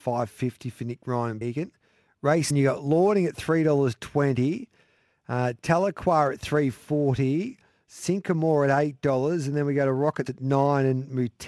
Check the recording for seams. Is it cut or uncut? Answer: cut